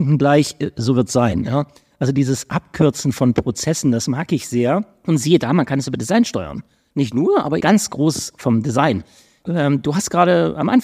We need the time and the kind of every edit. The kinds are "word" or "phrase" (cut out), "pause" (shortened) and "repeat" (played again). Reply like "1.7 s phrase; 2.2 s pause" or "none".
7.6 s word